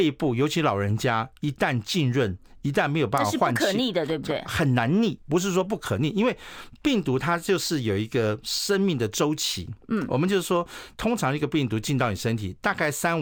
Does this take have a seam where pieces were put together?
no; 0 cuts

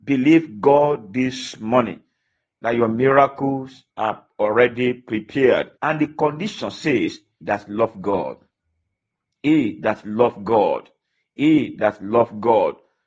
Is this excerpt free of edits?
no; 3 cuts; at 3.9 s, 5.8 s, 7.4 s

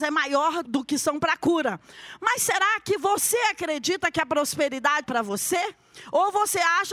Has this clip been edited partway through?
yes; 1 cut; at 5.0 s

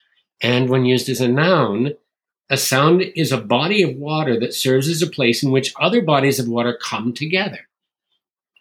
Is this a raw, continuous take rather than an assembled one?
yes; 0 cuts

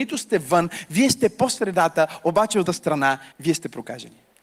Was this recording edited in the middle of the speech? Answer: yes; 2 cuts; at 2.7 s, 3.3 s

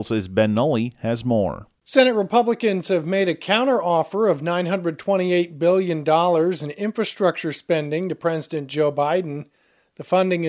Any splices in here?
no; 0 cuts

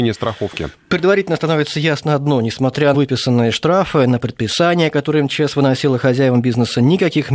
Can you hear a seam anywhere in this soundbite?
yes; 1 cut; at 2.9 s

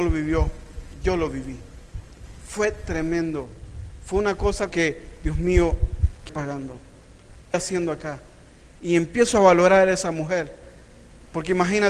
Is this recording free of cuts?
no; 3 cuts; at 4.7 s, 6.3 s, 7.5 s

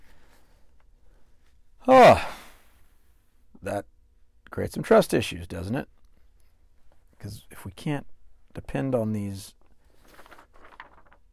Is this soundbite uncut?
yes; 0 cuts

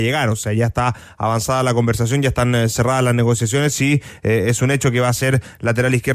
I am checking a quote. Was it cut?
no; 0 cuts

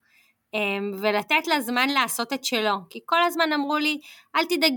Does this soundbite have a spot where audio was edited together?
no; 0 cuts

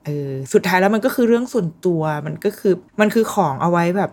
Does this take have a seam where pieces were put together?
yes; 1 cut; at 2.9 s

